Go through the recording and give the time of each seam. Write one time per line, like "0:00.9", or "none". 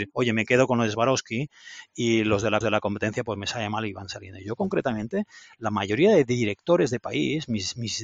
0:02.6